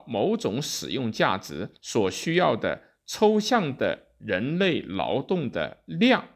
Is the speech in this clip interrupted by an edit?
yes; 1 cut; at 1.7 s

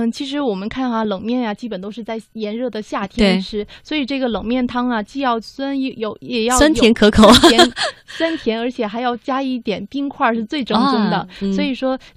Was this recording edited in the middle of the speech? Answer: no; 0 cuts

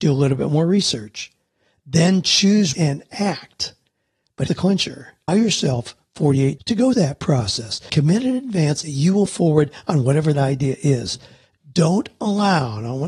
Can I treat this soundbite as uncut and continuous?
no; 9 cuts; at 2.7 s, 4.5 s, 5.3 s, 6.6 s, 6.9 s, 7.9 s, 8.8 s, 9.3 s, 10.3 s

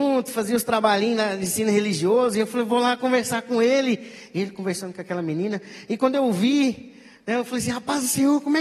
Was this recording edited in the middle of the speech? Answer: no; 0 cuts

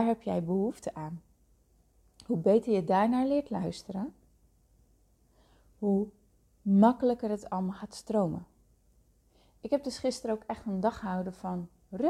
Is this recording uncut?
yes; 0 cuts

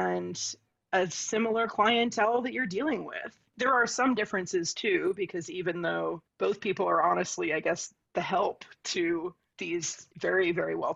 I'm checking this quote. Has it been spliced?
yes; 1 cut; at 6.3 s

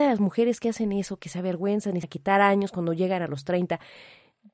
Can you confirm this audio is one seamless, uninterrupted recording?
no; 1 cut; at 2.0 s

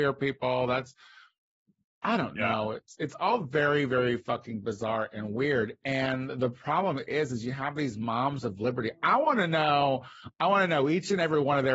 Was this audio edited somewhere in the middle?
no; 0 cuts

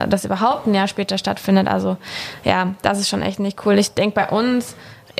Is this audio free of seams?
yes; 0 cuts

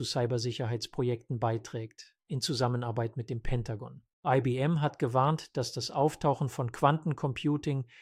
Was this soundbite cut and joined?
yes; 1 cut; at 4.1 s

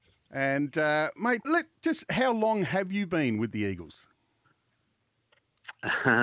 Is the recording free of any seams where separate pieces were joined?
no; 2 cuts; at 1.4 s, 1.8 s

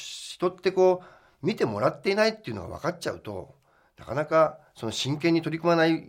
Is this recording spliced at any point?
no; 0 cuts

